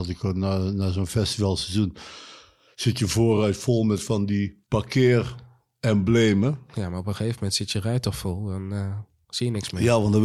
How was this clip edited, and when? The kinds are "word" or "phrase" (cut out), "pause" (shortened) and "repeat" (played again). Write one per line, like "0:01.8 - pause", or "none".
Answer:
none